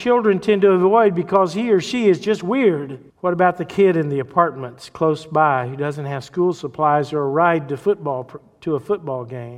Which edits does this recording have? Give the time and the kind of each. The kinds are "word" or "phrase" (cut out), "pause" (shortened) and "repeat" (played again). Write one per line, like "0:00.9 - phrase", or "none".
0:03.1 - pause